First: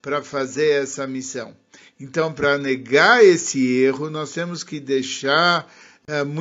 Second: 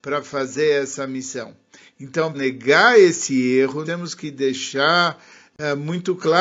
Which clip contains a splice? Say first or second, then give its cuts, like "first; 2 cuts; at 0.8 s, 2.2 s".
second; 2 cuts; at 2.3 s, 3.9 s